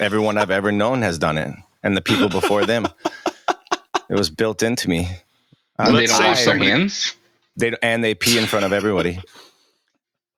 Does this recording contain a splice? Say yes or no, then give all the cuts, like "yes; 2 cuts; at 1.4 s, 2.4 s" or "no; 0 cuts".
no; 0 cuts